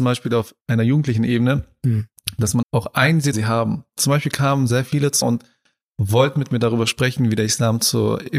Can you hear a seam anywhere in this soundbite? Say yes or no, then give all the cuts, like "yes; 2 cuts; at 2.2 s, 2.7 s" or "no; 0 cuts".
yes; 3 cuts; at 2.6 s, 3.3 s, 5.2 s